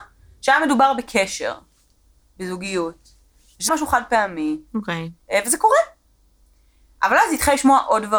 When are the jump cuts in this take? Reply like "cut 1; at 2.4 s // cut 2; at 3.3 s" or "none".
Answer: cut 1; at 3.7 s // cut 2; at 5.2 s

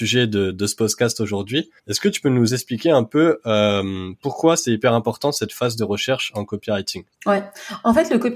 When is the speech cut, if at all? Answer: cut 1; at 1.8 s // cut 2; at 7.1 s

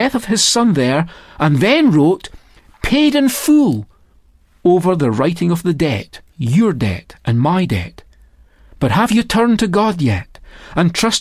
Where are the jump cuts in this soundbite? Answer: cut 1; at 6.3 s

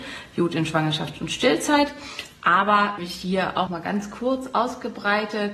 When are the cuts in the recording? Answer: cut 1; at 3.0 s // cut 2; at 3.7 s

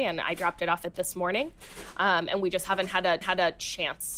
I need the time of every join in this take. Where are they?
cut 1; at 0.9 s // cut 2; at 3.2 s

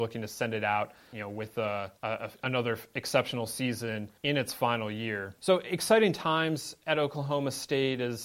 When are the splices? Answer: cut 1; at 2.0 s // cut 2; at 4.2 s // cut 3; at 5.4 s

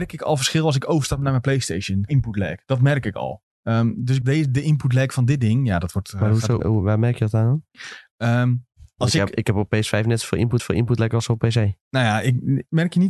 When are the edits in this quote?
cut 1; at 2.1 s // cut 2; at 3.5 s // cut 3; at 4.2 s // cut 4; at 6.6 s // cut 5; at 10.6 s // cut 6; at 11.8 s

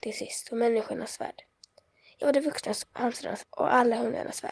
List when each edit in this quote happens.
cut 1; at 2.2 s // cut 2; at 2.8 s // cut 3; at 3.4 s

